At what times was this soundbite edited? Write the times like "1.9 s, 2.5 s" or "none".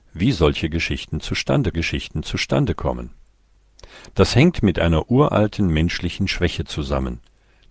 1.7 s